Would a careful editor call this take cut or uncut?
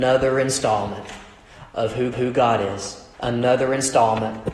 cut